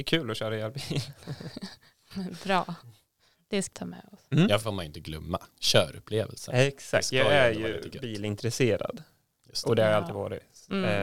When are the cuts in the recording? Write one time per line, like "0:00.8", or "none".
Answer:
0:03.7
0:04.6

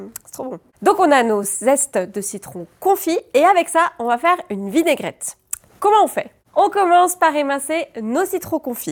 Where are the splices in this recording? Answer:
none

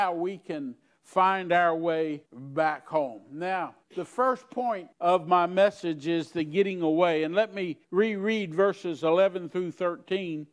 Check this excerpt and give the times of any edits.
0:02.3
0:03.8
0:04.9
0:07.8

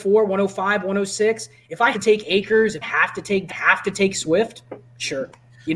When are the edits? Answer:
0:01.9
0:02.8
0:03.5

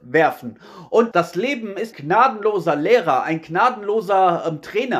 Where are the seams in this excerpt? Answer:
0:01.1
0:01.9

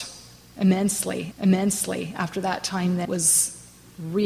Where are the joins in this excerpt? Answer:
0:01.3
0:03.0

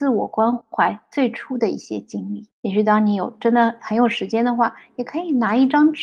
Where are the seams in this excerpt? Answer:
0:02.5

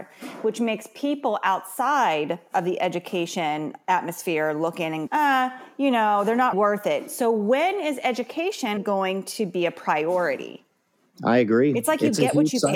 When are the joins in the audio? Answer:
0:05.1
0:06.5
0:08.8

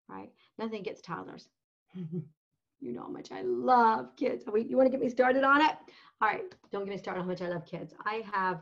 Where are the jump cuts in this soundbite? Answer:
none

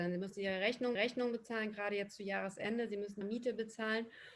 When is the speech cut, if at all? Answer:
0:00.9
0:03.2

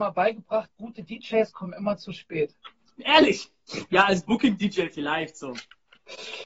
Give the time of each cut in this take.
none

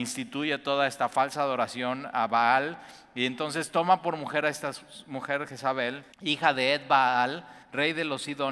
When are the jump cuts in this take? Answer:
0:06.1
0:07.6

